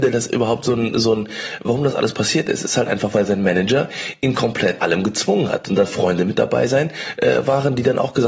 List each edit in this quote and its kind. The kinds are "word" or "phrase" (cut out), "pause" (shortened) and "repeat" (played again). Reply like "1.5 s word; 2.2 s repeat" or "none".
4.8 s word